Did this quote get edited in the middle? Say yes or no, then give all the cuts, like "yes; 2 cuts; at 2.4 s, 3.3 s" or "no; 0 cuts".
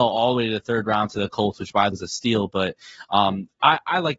yes; 1 cut; at 1.9 s